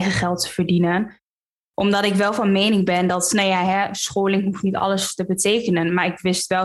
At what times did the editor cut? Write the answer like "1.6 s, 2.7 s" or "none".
none